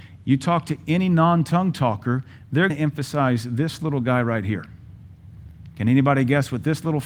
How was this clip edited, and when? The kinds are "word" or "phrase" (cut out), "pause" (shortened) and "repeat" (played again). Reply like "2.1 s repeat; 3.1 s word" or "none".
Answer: 2.7 s word